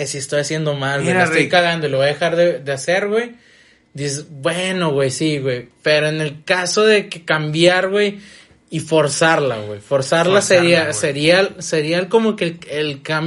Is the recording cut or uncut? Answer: uncut